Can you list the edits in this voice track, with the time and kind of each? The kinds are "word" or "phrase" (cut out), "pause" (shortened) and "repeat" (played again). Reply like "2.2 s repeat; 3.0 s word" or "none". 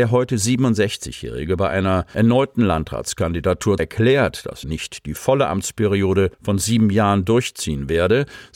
3.8 s word; 4.6 s word; 6.3 s pause